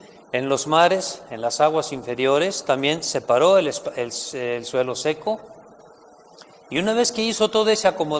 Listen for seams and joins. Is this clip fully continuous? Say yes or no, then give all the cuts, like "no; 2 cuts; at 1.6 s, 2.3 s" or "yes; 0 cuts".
yes; 0 cuts